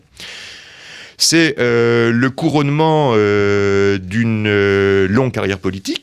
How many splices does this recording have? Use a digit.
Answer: 0